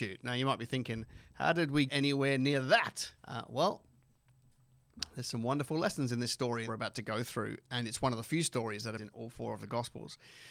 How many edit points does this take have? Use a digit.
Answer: 4